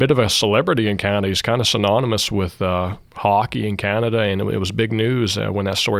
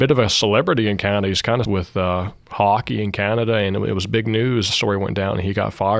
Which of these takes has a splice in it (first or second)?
second